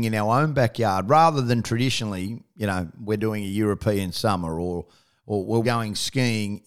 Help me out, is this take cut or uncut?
cut